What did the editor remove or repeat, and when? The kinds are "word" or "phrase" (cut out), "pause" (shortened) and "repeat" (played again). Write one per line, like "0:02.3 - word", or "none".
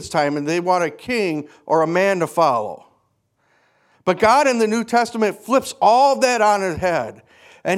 none